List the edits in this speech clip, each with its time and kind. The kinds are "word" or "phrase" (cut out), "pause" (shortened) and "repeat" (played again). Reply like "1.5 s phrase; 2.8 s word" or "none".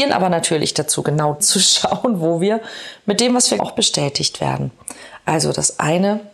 1.4 s word; 3.6 s word